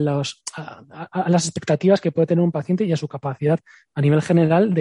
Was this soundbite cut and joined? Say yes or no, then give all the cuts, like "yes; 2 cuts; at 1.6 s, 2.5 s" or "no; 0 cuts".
no; 0 cuts